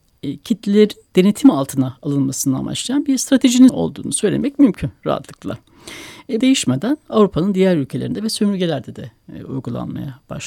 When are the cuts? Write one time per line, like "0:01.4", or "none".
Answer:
0:03.7
0:06.4